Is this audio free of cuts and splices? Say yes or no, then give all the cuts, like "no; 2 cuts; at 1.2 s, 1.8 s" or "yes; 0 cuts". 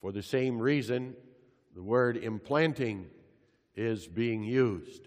yes; 0 cuts